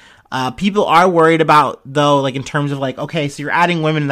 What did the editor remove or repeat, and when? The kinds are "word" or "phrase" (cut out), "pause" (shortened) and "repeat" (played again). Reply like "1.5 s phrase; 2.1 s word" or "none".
none